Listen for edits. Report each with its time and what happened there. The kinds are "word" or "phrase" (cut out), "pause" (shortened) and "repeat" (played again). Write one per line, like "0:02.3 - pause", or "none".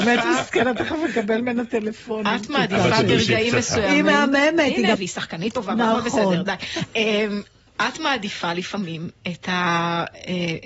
0:05.0 - word